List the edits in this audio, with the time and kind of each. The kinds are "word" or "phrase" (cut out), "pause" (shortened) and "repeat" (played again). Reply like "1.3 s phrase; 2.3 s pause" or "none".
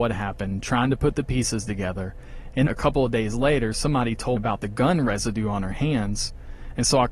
2.7 s word; 4.4 s word